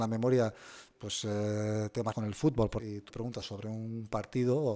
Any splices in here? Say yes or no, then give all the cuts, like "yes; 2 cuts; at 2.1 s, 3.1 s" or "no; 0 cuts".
yes; 4 cuts; at 2.1 s, 2.8 s, 3.1 s, 3.4 s